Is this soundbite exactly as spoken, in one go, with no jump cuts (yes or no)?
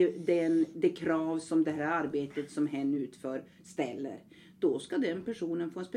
yes